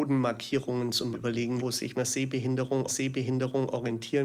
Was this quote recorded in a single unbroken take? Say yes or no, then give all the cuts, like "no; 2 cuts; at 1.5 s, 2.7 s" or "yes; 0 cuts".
no; 4 cuts; at 1.1 s, 1.6 s, 1.9 s, 2.9 s